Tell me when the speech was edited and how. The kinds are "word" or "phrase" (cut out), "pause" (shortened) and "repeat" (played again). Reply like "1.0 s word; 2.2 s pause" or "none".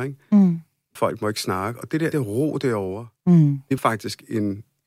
1.0 s word; 2.1 s word; 3.8 s word